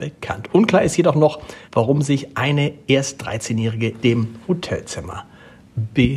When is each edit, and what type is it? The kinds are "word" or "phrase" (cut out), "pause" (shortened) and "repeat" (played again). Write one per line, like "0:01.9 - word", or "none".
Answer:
0:01.6 - pause
0:04.0 - word

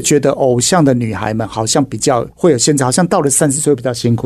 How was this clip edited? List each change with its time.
0:02.3 - pause

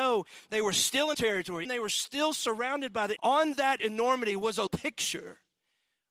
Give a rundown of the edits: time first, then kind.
0:01.1 - word
0:01.6 - word
0:03.2 - word
0:03.8 - word
0:04.7 - word

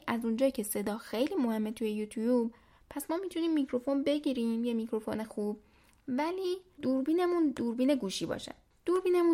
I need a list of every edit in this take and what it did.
none

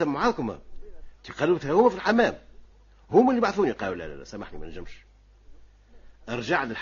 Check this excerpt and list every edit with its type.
none

